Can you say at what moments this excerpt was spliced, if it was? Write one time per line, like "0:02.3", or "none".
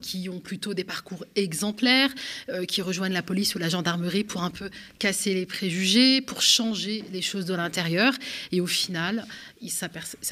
none